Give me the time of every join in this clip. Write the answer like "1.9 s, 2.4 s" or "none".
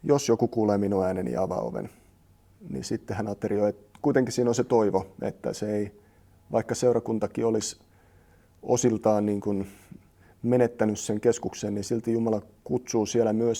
none